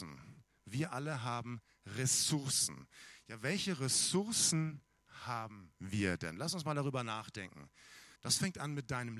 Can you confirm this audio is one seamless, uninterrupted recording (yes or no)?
no